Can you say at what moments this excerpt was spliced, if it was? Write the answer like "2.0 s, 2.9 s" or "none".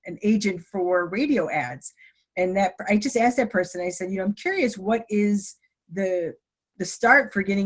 none